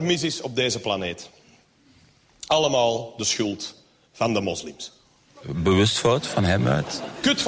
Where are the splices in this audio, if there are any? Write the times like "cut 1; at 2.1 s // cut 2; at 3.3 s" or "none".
none

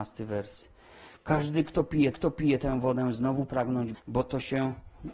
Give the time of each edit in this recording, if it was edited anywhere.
cut 1; at 2.1 s // cut 2; at 3.9 s

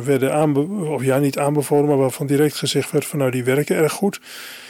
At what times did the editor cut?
none

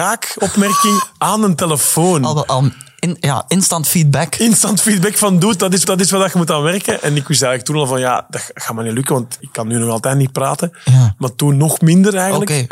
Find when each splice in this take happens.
cut 1; at 5.8 s // cut 2; at 9.4 s

